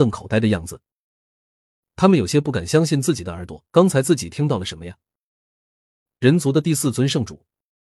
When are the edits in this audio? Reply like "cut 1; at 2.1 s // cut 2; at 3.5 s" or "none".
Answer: cut 1; at 3.7 s